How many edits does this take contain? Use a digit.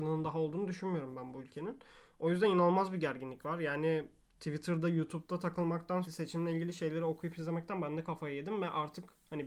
1